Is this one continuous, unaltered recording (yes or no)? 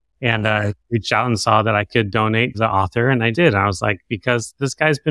no